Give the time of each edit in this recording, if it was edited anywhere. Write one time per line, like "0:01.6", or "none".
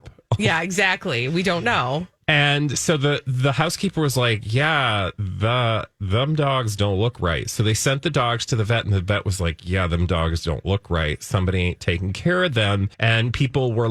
0:12.9